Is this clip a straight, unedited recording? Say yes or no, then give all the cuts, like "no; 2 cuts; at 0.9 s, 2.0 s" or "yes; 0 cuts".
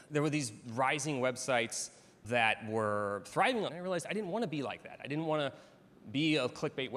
no; 1 cut; at 3.7 s